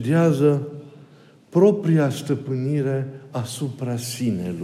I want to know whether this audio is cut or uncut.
uncut